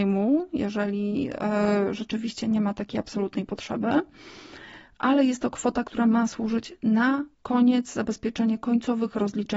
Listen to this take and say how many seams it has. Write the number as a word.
one